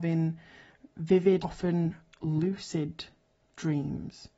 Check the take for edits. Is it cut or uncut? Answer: cut